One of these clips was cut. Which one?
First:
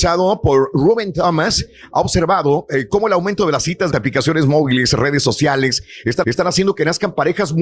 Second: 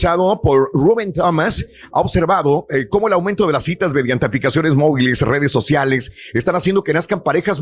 first; 2 cuts; at 3.9 s, 6.2 s

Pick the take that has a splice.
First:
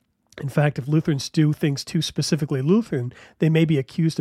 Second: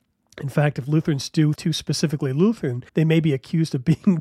second; 2 cuts; at 1.6 s, 2.9 s

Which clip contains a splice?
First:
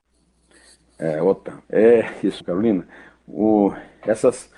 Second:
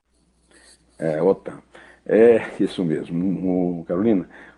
first; 2 cuts; at 1.6 s, 2.4 s

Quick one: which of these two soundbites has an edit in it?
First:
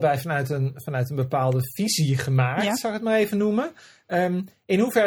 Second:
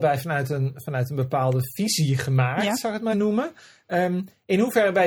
second; 1 cut; at 3.1 s

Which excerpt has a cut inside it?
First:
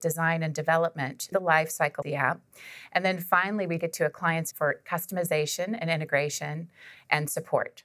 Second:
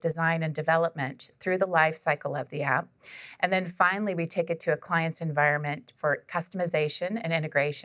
first; 4 cuts; at 1.3 s, 2.0 s, 3.8 s, 4.5 s

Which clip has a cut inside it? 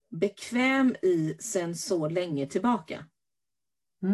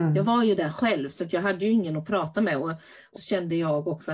second; 1 cut; at 3.2 s

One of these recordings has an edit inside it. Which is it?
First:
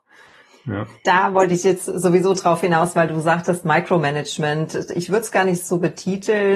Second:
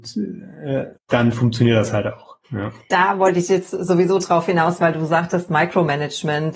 second; 2 cuts; at 1.0 s, 2.4 s

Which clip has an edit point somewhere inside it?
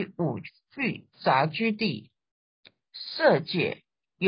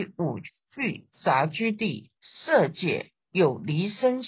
second; 2 cuts; at 2.2 s, 3.2 s

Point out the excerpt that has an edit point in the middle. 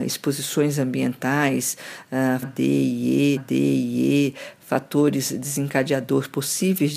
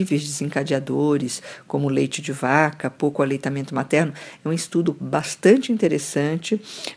first; 2 cuts; at 2.4 s, 3.4 s

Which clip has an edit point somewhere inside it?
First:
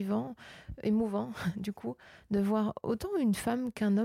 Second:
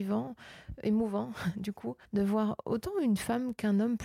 second; 1 cut; at 2.1 s

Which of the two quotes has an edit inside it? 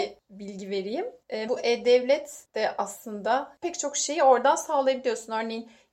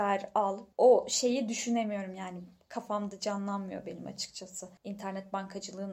first; 2 cuts; at 1.5 s, 3.6 s

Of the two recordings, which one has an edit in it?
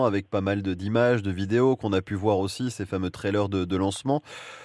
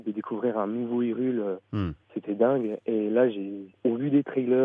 second; 1 cut; at 2.0 s

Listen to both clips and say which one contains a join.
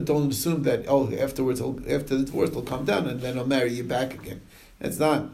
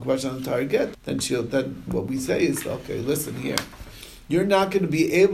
second; 2 cuts; at 0.9 s, 1.9 s

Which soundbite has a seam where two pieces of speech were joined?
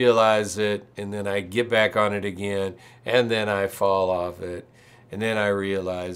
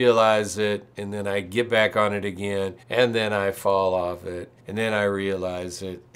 second; 2 cuts; at 2.8 s, 4.6 s

